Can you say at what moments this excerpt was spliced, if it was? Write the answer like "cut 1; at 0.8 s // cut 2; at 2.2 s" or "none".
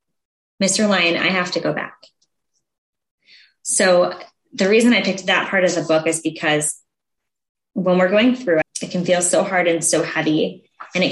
cut 1; at 8.6 s